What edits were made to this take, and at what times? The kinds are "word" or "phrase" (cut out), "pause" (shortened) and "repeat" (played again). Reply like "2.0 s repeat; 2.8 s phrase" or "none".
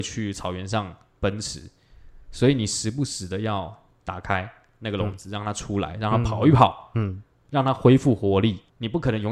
none